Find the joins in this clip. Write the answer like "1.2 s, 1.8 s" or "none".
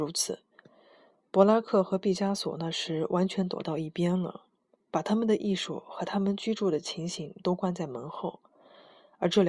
4.7 s

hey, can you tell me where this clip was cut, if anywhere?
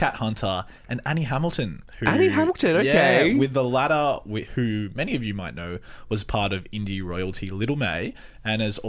1.9 s

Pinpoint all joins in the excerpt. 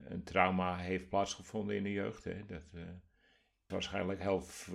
3.7 s

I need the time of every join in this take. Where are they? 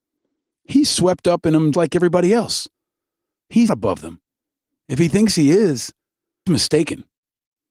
1.7 s, 3.7 s, 6.5 s

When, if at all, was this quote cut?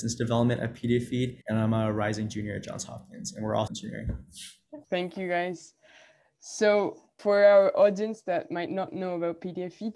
1.4 s, 3.7 s, 4.8 s, 7.2 s

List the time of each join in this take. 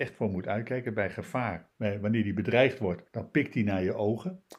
1.7 s, 3.1 s

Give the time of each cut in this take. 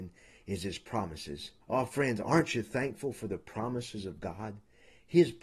1.6 s

